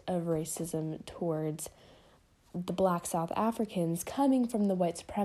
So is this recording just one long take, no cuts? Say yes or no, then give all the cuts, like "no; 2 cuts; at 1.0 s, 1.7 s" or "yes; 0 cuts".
yes; 0 cuts